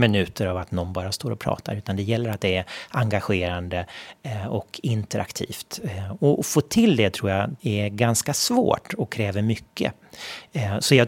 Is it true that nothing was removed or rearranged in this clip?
no; 1 cut; at 7.6 s

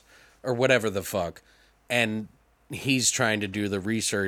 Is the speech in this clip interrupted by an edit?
no; 0 cuts

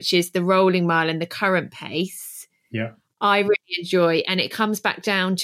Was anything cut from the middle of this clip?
no; 0 cuts

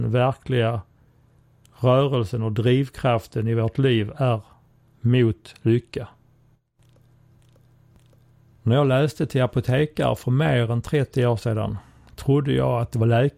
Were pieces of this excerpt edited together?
no; 0 cuts

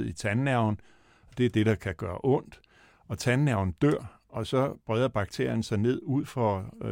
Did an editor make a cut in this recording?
no; 0 cuts

